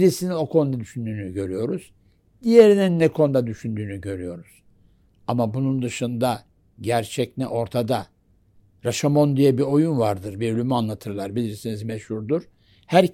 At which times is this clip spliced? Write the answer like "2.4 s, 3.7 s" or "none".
none